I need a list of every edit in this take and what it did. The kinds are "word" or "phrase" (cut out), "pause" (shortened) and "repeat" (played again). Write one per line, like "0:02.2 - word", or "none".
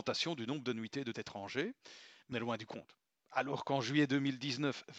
0:01.1 - word
0:02.3 - word